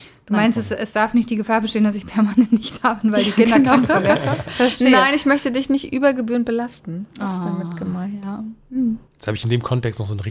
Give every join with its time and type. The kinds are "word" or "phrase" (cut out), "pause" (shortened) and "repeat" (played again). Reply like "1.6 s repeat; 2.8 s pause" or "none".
9.1 s pause